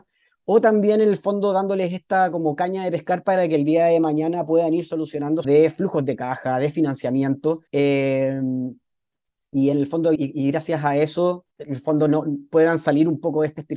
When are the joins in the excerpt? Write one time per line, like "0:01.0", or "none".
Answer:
0:05.4
0:07.7
0:10.2
0:11.5